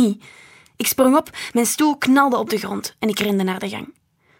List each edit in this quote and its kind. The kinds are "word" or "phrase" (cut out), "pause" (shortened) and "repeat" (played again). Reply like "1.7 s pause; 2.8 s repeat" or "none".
none